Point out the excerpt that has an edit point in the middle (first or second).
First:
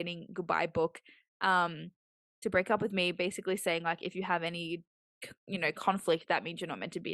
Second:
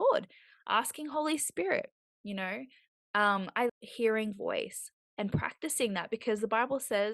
second